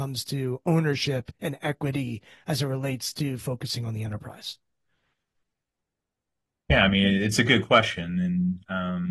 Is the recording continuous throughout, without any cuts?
yes; 0 cuts

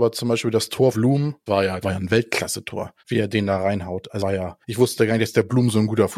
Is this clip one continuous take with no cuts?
no; 6 cuts; at 0.9 s, 1.5 s, 1.8 s, 3.0 s, 4.2 s, 4.6 s

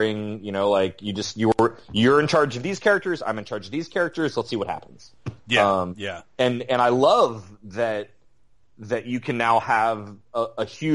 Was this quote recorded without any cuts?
yes; 0 cuts

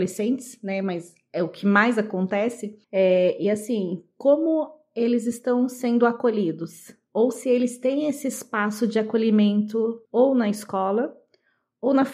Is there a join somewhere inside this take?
yes; 2 cuts; at 2.8 s, 10.0 s

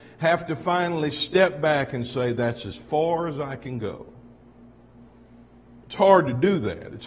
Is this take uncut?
yes; 0 cuts

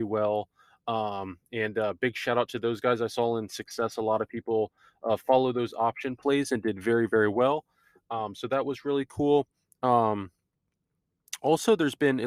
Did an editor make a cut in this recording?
no; 0 cuts

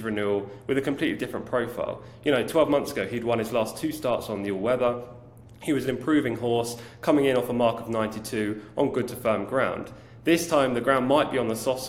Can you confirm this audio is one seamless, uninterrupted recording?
yes; 0 cuts

